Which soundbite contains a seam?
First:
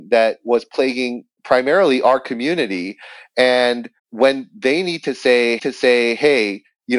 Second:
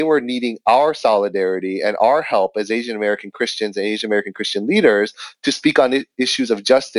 first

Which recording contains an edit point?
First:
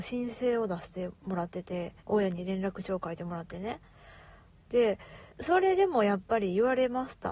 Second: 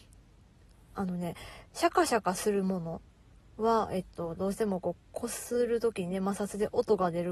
first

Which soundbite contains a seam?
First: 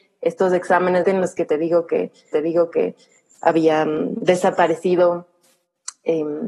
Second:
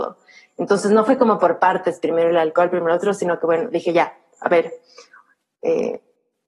first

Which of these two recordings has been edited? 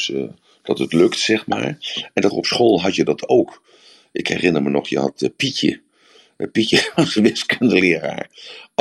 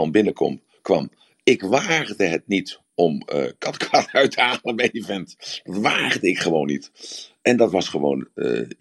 first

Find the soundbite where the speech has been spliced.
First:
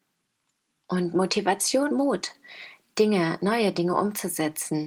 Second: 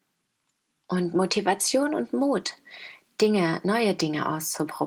first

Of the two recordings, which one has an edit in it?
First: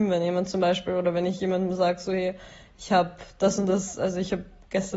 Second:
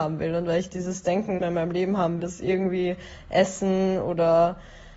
second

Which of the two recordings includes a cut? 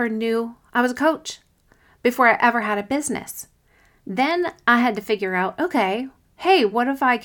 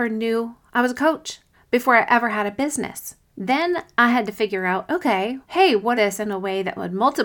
second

